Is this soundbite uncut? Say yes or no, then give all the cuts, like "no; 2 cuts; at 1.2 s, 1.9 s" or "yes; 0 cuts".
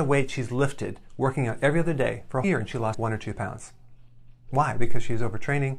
no; 2 cuts; at 2.4 s, 2.9 s